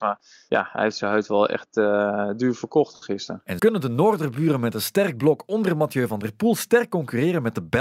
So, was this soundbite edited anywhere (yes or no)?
yes